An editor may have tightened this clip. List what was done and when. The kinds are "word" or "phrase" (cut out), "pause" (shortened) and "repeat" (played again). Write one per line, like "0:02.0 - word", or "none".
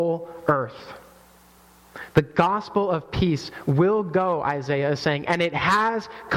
none

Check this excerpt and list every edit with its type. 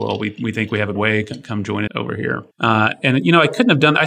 0:00.9 - word
0:01.9 - word
0:02.5 - pause

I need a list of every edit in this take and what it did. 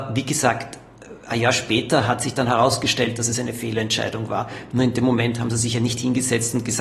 none

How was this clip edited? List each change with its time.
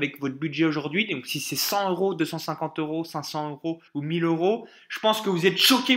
0:03.9 - pause

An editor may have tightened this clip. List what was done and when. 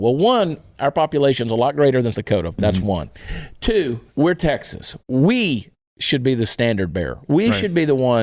0:02.1 - word
0:04.1 - pause
0:05.0 - pause

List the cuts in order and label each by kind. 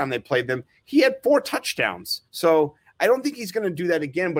0:02.3 - pause

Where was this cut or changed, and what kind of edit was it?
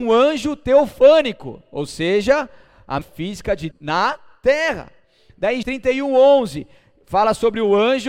0:03.0 - word
0:03.7 - word
0:05.6 - word

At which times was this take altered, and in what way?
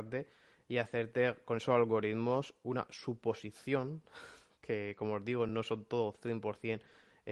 none

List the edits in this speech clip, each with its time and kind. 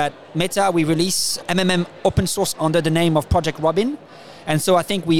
0:01.4 - word
0:02.5 - word

